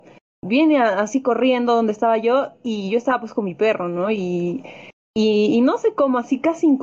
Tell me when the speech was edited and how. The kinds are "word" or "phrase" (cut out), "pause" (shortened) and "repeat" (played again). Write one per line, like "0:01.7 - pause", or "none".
none